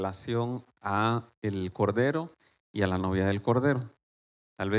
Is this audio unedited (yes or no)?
yes